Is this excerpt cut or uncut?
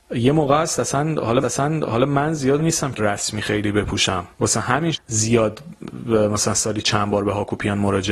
cut